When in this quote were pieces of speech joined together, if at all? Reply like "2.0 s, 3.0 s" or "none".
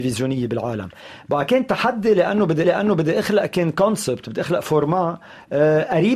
2.6 s